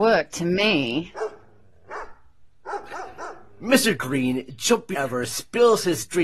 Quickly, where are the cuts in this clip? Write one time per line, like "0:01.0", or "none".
0:04.9